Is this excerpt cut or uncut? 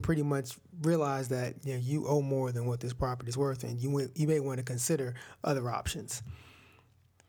uncut